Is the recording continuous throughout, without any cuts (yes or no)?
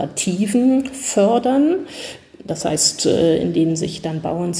yes